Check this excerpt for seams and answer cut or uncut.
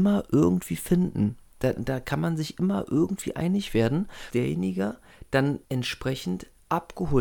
cut